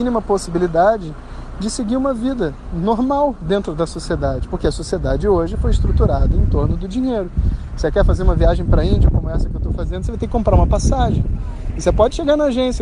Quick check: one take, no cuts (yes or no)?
yes